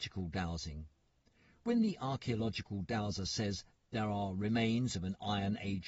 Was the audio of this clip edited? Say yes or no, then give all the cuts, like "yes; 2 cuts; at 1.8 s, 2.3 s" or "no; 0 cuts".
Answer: no; 0 cuts